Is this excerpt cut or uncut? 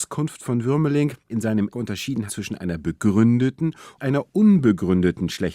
cut